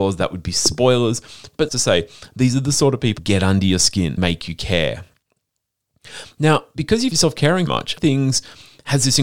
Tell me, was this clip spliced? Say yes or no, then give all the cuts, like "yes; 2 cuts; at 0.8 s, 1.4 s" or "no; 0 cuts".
yes; 6 cuts; at 1.7 s, 3.2 s, 4.2 s, 7.1 s, 7.7 s, 8.0 s